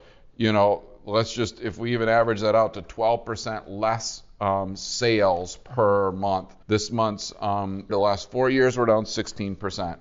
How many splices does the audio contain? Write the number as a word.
two